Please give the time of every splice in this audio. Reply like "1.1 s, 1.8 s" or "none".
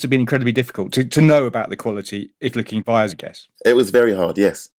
2.5 s, 3.1 s, 3.6 s